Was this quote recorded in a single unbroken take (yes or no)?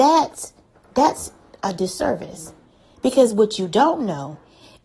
yes